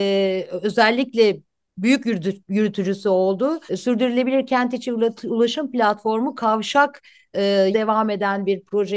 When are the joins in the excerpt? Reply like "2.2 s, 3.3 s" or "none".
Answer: 3.7 s, 7.7 s